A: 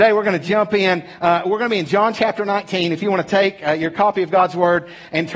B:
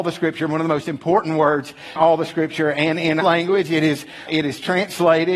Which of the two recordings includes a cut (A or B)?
B